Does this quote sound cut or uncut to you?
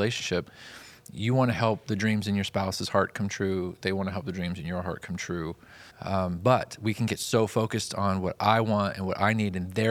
cut